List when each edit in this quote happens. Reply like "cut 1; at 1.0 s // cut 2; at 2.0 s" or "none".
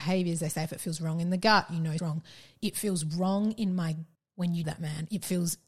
cut 1; at 2.0 s // cut 2; at 4.1 s // cut 3; at 4.6 s